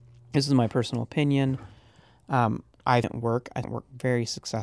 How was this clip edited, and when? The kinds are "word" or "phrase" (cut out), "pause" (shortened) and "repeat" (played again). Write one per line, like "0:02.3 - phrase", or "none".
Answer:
0:03.0 - word
0:03.6 - word